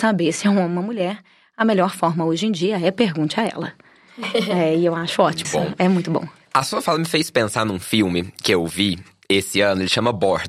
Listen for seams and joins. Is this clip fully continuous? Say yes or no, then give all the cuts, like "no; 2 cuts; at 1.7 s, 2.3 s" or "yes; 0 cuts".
no; 1 cut; at 5.4 s